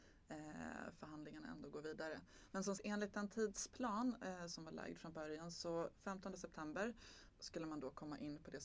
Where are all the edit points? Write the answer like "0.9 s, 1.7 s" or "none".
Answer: 2.8 s, 7.3 s